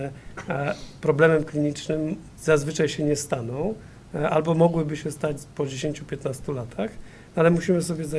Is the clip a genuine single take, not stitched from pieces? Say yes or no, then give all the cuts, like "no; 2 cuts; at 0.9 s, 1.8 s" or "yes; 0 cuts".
yes; 0 cuts